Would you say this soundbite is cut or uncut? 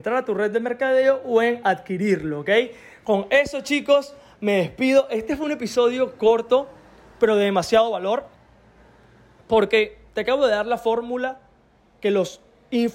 uncut